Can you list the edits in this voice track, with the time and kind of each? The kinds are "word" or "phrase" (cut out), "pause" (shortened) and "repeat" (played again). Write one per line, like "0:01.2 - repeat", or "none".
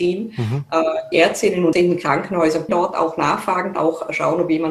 0:01.1 - word
0:01.7 - word
0:02.7 - word
0:03.7 - word

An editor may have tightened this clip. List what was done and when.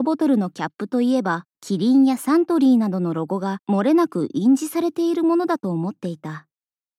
0:01.5 - pause
0:03.6 - pause

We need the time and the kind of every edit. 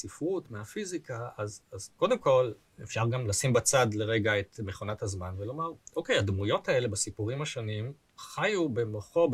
none

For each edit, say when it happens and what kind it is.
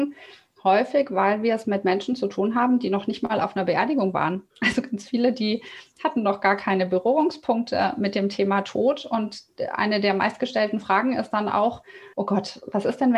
0:04.5 - pause
0:12.1 - pause

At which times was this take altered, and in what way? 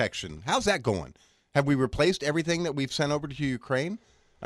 none

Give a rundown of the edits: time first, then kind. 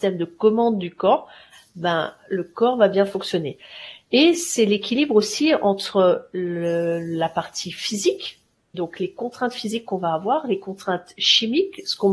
none

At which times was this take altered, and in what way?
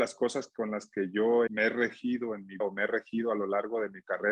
0:01.5 - word
0:02.6 - word

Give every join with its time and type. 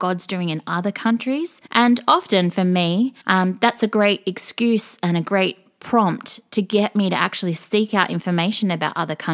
0:01.7 - pause
0:03.2 - pause

